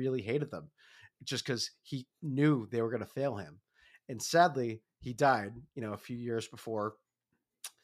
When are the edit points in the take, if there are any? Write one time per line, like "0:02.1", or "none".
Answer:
none